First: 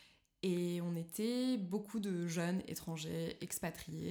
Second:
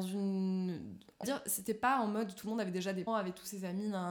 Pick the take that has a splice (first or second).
second